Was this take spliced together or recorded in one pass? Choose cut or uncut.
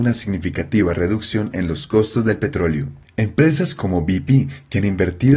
uncut